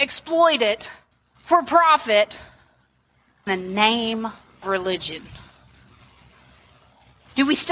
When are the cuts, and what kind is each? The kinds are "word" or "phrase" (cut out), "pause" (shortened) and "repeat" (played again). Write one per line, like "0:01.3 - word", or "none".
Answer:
0:01.1 - pause
0:03.5 - phrase
0:04.6 - word

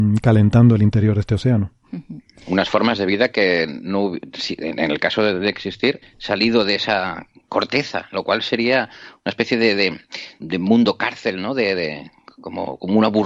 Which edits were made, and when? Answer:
0:06.0 - phrase
0:10.4 - word

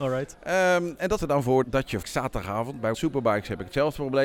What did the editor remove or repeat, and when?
0:01.2 - word
0:01.6 - word
0:02.0 - word
0:02.9 - word

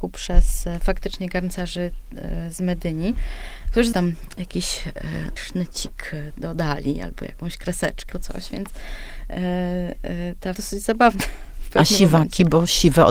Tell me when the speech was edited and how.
0:03.9 - word
0:05.4 - word
0:08.1 - word
0:10.5 - phrase

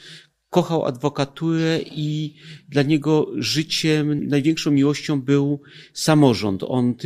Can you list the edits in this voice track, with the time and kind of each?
0:04.2 - word

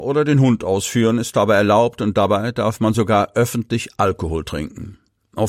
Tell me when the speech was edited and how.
none

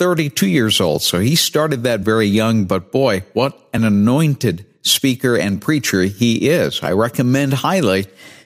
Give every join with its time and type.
none

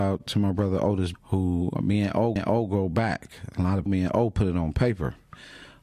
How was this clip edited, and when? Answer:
0:01.1 - word
0:01.7 - word
0:02.4 - repeat
0:03.9 - phrase

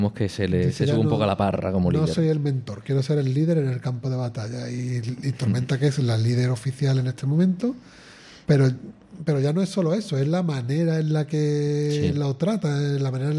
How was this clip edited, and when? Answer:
none

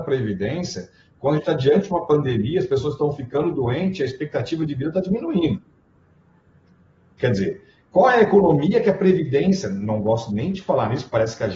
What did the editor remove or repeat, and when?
none

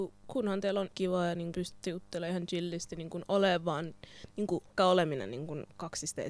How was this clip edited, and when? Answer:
0:00.9 - word
0:01.5 - word
0:04.8 - word

